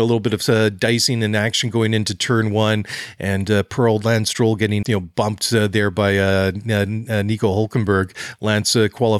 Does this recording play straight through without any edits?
no; 1 cut; at 4.8 s

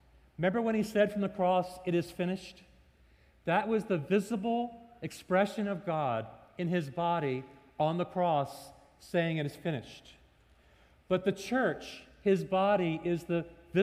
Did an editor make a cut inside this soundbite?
no; 0 cuts

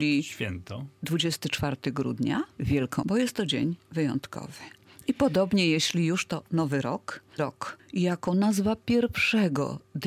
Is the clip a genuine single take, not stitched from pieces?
no; 2 cuts; at 3.0 s, 7.4 s

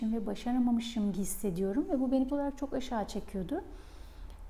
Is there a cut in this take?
yes; 2 cuts; at 1.1 s, 2.3 s

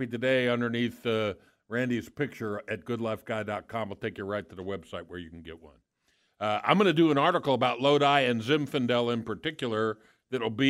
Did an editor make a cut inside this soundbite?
no; 0 cuts

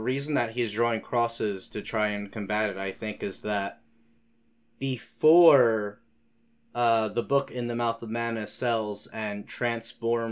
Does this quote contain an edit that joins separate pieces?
no; 0 cuts

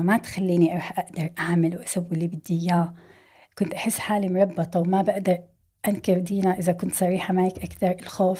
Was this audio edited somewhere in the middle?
no; 0 cuts

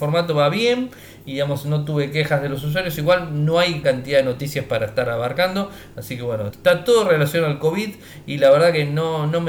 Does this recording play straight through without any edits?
no; 2 cuts; at 3.8 s, 6.5 s

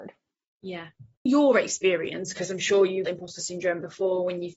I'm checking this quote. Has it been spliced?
yes; 2 cuts; at 1.3 s, 3.1 s

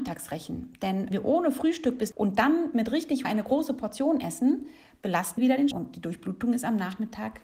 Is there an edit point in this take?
yes; 5 cuts; at 1.1 s, 2.1 s, 3.2 s, 5.4 s, 5.7 s

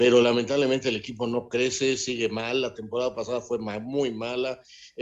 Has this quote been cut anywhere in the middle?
no; 0 cuts

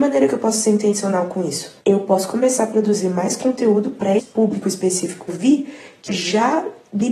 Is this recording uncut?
no; 4 cuts; at 1.8 s, 4.2 s, 5.3 s, 6.1 s

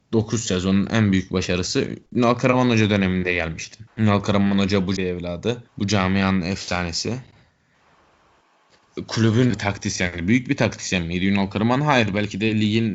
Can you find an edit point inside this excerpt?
yes; 5 cuts; at 2.1 s, 3.9 s, 5.0 s, 5.7 s, 9.5 s

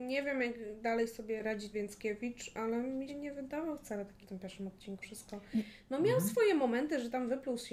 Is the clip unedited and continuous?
no; 4 cuts; at 1.7 s, 3.1 s, 4.2 s, 5.0 s

